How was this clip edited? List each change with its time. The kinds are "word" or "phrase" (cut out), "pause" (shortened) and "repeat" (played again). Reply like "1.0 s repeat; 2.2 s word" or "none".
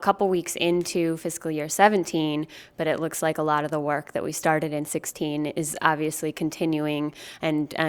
none

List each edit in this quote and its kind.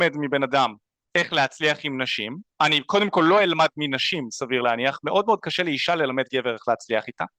none

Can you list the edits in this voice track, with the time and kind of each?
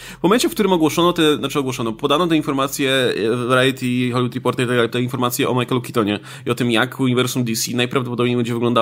4.9 s word

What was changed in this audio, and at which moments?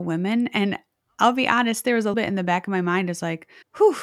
2.1 s word

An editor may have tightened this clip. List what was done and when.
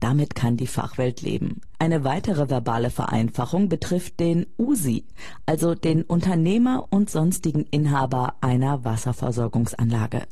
none

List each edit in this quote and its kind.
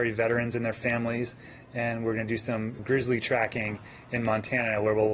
2.8 s word

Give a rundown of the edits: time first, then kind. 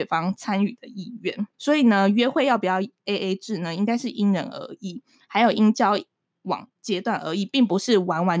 1.5 s pause

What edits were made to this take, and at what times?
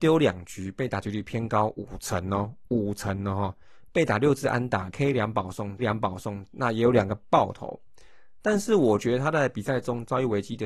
4.9 s word; 5.8 s repeat

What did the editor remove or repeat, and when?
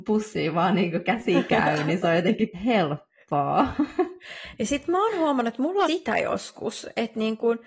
2.5 s word; 5.9 s phrase

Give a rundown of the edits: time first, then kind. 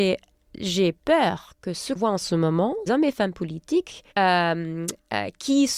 1.0 s pause; 2.0 s word; 2.9 s phrase; 4.1 s pause

